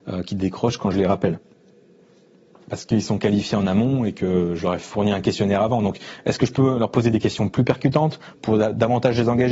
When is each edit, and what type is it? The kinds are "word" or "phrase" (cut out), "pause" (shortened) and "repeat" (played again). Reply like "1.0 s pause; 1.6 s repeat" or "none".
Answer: none